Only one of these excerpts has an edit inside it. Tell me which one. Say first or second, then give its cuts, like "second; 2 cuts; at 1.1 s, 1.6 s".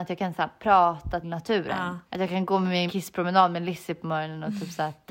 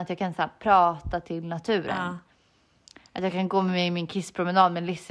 first; 3 cuts; at 1.2 s, 2.1 s, 2.9 s